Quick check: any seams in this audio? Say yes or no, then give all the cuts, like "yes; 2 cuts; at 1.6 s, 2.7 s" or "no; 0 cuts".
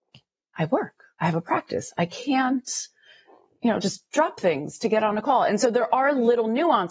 no; 0 cuts